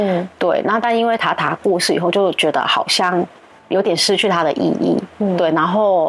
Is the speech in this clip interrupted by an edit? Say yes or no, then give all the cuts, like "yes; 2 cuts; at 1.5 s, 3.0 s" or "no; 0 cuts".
no; 0 cuts